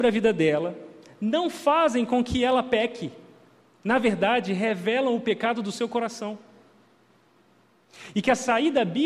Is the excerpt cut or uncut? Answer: uncut